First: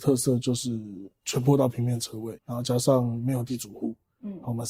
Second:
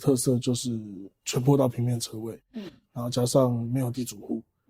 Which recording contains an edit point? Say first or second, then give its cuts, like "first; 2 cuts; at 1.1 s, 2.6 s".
first; 1 cut; at 2.4 s